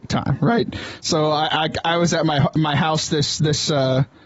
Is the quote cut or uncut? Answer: uncut